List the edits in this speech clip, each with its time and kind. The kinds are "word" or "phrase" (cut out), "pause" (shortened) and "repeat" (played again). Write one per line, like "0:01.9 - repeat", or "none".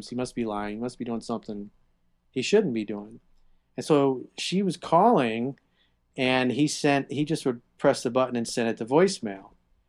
none